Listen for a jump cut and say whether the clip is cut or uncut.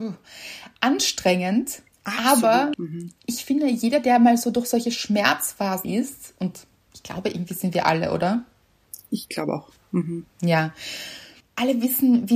cut